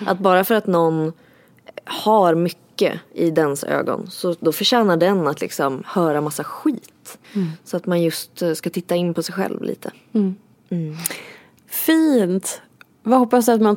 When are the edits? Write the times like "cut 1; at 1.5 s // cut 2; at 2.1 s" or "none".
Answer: cut 1; at 7.2 s